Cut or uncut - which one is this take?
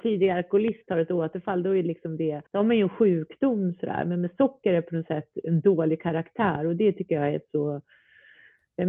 cut